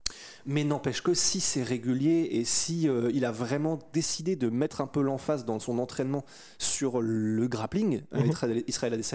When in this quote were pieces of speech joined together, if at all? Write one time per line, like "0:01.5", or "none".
none